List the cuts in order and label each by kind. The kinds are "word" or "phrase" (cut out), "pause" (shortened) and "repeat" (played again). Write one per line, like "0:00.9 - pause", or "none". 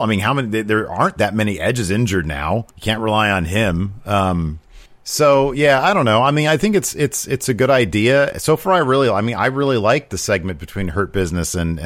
0:02.7 - pause
0:04.9 - pause